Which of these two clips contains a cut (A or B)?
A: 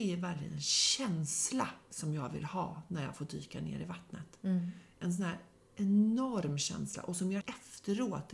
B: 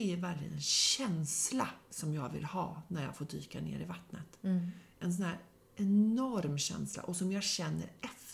A